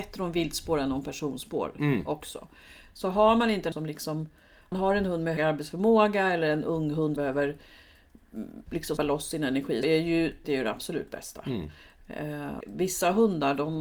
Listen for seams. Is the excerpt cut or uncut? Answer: cut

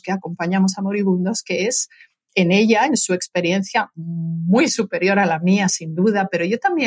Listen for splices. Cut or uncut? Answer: uncut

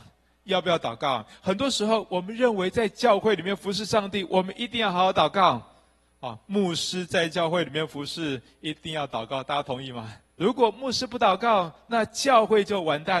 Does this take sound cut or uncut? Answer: cut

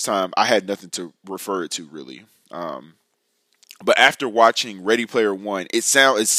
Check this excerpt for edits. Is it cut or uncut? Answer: uncut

